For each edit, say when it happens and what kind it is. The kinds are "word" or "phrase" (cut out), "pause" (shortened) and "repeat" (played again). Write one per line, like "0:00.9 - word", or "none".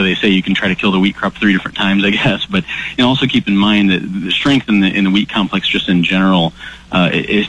none